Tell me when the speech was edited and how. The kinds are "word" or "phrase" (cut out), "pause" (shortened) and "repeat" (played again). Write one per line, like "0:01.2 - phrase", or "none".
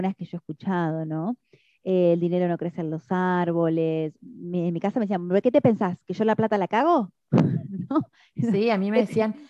none